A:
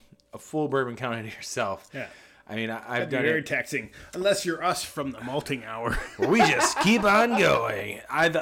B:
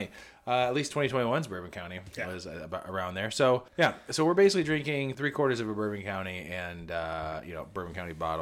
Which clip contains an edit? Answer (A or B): B